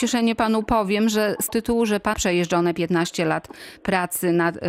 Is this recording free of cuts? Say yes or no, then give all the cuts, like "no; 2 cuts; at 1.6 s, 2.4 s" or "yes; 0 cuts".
no; 2 cuts; at 1.5 s, 2.1 s